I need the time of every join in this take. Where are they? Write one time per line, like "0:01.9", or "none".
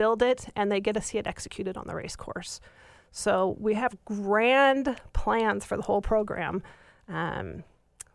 none